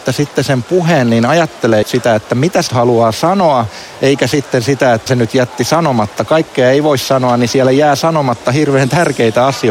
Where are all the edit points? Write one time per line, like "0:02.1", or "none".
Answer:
0:01.8
0:02.7
0:05.1
0:06.3